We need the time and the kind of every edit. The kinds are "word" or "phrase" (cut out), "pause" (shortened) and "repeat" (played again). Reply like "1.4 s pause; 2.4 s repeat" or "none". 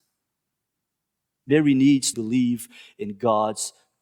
2.1 s word